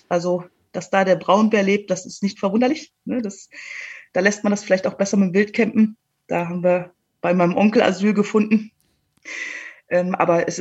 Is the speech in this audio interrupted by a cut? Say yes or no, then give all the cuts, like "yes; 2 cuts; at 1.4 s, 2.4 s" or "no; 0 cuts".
no; 0 cuts